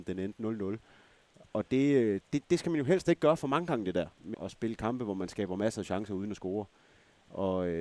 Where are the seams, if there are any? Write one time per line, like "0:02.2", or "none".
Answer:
0:04.3